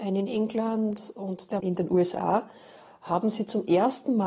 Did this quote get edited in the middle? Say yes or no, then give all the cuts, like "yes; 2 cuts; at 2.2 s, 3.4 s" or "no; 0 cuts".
yes; 2 cuts; at 1.1 s, 1.6 s